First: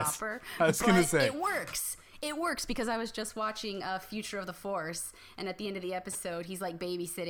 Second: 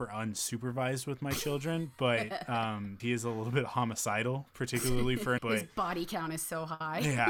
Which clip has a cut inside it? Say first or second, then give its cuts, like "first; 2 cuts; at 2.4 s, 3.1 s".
second; 2 cuts; at 3.0 s, 5.4 s